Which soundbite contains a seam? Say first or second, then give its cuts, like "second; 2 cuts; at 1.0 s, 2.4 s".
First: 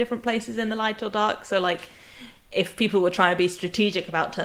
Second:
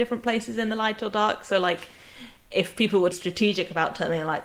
second; 1 cut; at 3.1 s